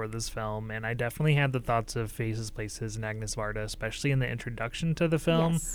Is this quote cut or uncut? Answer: uncut